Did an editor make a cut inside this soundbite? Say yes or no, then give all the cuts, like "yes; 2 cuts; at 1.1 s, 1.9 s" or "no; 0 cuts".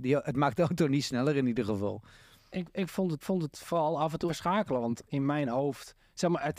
yes; 2 cuts; at 3.2 s, 4.3 s